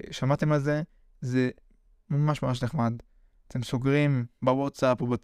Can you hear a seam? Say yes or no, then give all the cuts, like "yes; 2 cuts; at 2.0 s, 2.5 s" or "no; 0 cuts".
no; 0 cuts